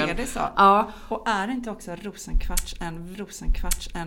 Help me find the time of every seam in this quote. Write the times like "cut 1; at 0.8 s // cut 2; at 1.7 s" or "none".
cut 1; at 3.1 s